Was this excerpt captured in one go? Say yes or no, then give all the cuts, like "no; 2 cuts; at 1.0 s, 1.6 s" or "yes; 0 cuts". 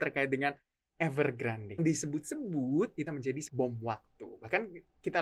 no; 3 cuts; at 1.8 s, 3.1 s, 3.5 s